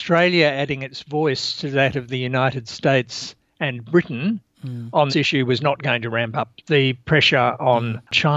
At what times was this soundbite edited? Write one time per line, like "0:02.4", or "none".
0:05.1
0:06.6